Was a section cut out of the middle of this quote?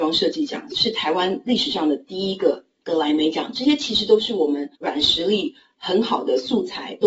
yes; 1 cut; at 4.8 s

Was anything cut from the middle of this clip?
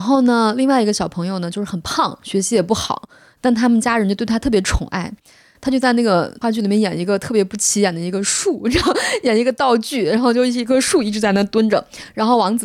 no; 0 cuts

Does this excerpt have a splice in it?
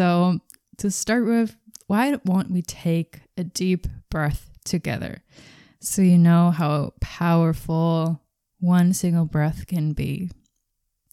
no; 0 cuts

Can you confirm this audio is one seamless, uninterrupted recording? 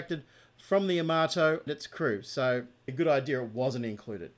no; 2 cuts; at 1.7 s, 2.9 s

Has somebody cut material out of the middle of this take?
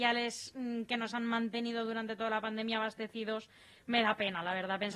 no; 0 cuts

